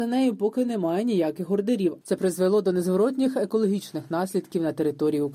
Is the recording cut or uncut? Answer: uncut